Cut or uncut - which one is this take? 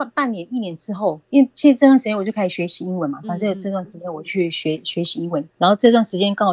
cut